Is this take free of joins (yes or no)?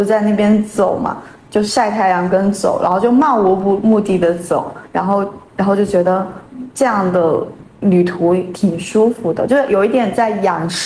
yes